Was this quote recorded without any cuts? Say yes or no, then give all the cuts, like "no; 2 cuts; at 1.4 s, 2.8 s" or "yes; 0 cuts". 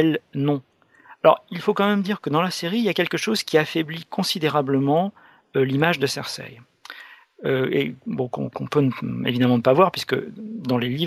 yes; 0 cuts